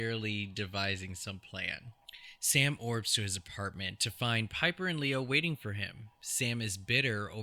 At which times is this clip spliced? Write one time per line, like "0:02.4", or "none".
none